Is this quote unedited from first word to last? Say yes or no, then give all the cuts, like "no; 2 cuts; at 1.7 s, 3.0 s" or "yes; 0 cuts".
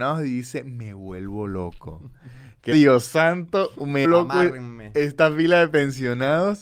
no; 2 cuts; at 2.7 s, 4.0 s